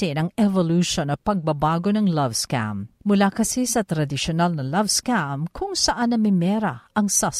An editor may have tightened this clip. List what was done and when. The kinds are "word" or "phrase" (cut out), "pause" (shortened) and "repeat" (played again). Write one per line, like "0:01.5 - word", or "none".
0:03.0 - pause